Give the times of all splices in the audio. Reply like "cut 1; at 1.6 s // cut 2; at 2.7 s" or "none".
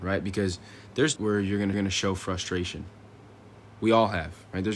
cut 1; at 1.2 s // cut 2; at 1.7 s